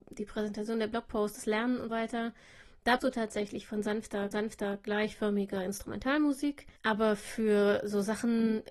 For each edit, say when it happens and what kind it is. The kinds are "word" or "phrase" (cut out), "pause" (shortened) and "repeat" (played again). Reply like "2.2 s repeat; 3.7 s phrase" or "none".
1.9 s word; 3.0 s word; 4.3 s repeat; 6.8 s pause